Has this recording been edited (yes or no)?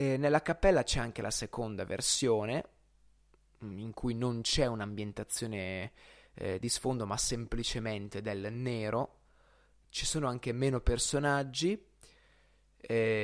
no